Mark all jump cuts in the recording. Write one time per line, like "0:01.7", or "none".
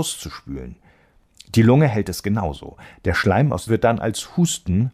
0:03.7